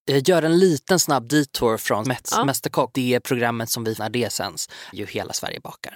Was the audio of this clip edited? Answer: yes; 4 cuts; at 2.0 s, 2.9 s, 4.0 s, 4.9 s

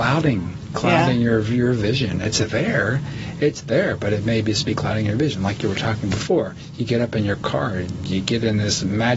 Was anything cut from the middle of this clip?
no; 0 cuts

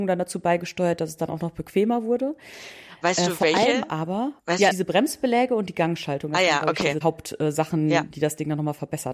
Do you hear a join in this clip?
yes; 3 cuts; at 4.4 s, 4.7 s, 7.0 s

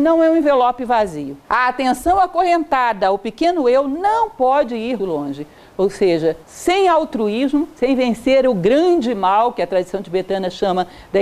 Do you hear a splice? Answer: yes; 3 cuts; at 1.4 s, 5.0 s, 6.4 s

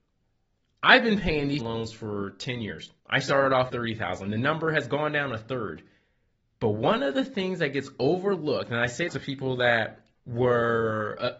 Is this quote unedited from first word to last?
no; 6 cuts; at 1.6 s, 3.0 s, 3.7 s, 6.4 s, 9.1 s, 10.1 s

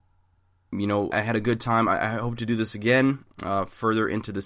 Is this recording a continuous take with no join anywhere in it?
no; 1 cut; at 1.1 s

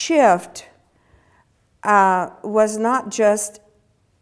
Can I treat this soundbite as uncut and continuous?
yes; 0 cuts

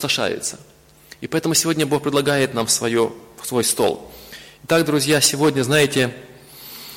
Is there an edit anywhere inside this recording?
no; 0 cuts

